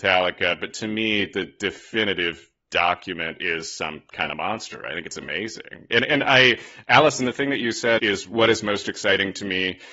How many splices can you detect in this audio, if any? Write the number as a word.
one